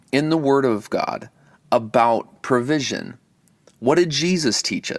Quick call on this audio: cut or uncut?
uncut